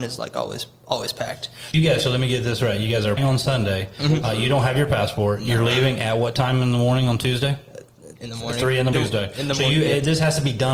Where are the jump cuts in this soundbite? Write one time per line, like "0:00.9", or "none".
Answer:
0:01.7
0:03.2
0:08.2
0:08.9